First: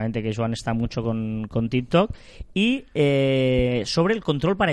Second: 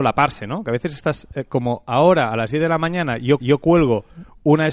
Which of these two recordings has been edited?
second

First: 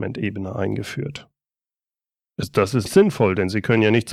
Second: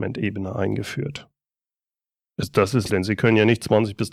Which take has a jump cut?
second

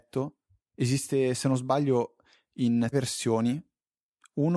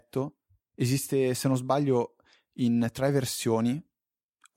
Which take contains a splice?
first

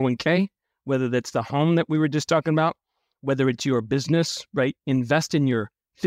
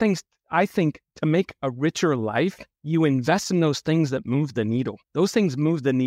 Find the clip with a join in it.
second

